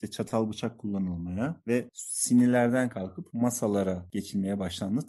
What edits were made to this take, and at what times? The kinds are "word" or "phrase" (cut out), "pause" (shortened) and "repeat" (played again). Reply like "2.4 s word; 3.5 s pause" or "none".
none